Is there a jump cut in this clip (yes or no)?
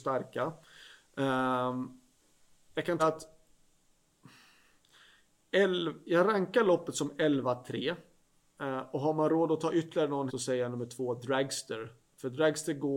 yes